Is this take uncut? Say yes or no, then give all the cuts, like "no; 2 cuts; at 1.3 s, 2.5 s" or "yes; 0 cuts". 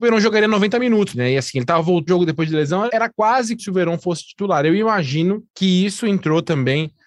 no; 5 cuts; at 1.1 s, 2.1 s, 2.9 s, 3.6 s, 5.5 s